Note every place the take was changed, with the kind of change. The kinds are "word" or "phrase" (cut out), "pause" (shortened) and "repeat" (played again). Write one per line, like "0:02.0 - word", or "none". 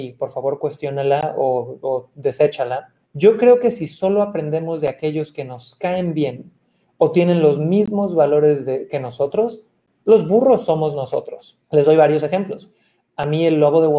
0:03.0 - pause
0:11.6 - pause